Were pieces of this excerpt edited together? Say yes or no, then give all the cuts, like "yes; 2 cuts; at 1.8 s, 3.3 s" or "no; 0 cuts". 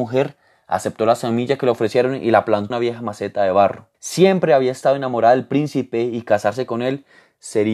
yes; 2 cuts; at 2.7 s, 3.9 s